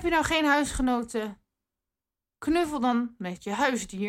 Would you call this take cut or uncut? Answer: uncut